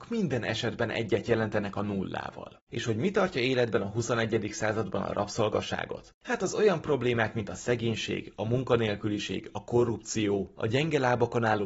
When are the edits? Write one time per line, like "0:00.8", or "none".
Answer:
none